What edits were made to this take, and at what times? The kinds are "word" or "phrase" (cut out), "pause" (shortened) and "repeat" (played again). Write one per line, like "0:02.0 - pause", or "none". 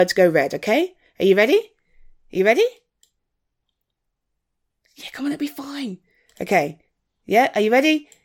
none